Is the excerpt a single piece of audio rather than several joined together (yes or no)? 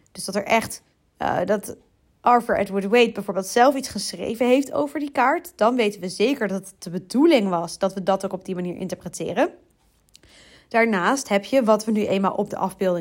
yes